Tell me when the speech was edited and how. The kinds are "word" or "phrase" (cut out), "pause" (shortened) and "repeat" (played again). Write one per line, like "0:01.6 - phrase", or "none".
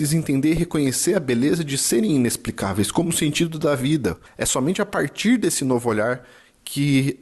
none